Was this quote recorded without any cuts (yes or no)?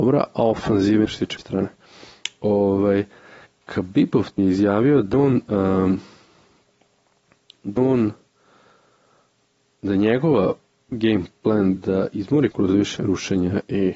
no